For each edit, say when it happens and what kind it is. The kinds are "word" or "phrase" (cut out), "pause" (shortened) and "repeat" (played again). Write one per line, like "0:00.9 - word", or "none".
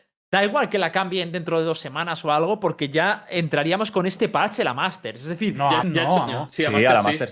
0:05.8 - phrase
0:06.3 - word